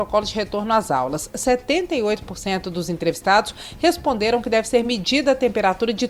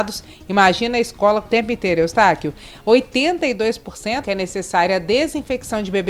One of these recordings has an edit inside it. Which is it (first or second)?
second